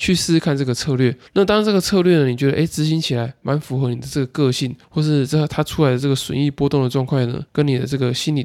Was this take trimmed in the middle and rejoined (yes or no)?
yes